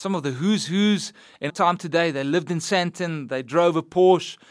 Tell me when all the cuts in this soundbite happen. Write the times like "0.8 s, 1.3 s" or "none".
1.5 s